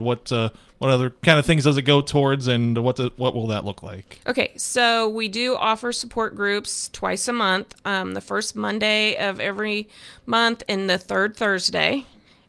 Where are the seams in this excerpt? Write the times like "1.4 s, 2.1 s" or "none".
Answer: none